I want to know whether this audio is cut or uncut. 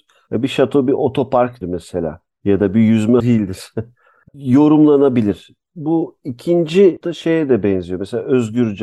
cut